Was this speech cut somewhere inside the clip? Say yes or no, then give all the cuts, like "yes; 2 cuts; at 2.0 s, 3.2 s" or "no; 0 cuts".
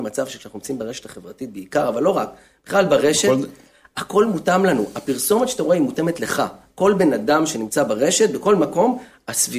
no; 0 cuts